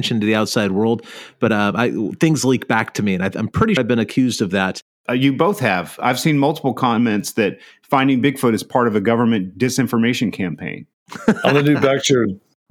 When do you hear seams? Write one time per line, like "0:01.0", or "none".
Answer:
0:03.8